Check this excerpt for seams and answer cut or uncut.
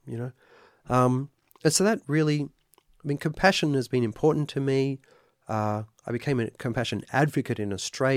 uncut